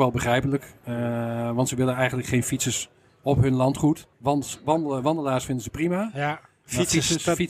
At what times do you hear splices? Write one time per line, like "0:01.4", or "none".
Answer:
none